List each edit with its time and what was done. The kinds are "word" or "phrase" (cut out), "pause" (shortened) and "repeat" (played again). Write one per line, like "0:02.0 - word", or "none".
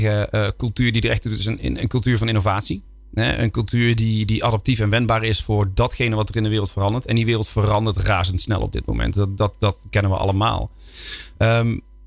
none